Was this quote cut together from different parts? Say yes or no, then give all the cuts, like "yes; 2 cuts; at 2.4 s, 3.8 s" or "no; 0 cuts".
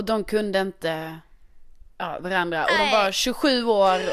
yes; 1 cut; at 2.2 s